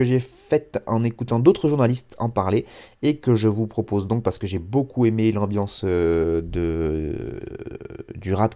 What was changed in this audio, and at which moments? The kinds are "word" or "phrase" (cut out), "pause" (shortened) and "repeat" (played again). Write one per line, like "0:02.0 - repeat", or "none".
none